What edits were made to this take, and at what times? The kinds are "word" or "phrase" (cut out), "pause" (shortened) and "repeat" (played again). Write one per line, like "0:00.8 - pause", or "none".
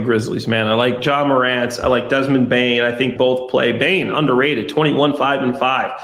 0:03.2 - phrase